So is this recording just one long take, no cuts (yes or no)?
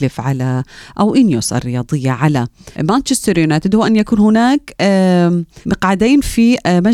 no